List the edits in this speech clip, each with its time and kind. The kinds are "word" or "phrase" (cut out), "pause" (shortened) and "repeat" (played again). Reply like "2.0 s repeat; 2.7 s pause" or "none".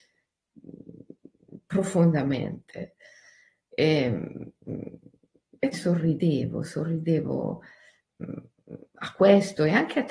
5.7 s word